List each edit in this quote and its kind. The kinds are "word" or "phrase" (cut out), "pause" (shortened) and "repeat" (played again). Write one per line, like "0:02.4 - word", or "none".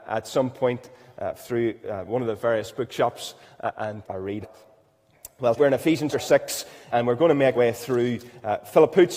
0:04.0 - word
0:04.4 - word
0:05.6 - word
0:06.1 - word
0:06.9 - word
0:07.6 - word